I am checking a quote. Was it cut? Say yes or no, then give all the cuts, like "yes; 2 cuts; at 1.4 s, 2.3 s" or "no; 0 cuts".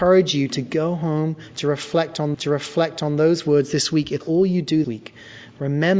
yes; 3 cuts; at 2.3 s, 4.2 s, 4.8 s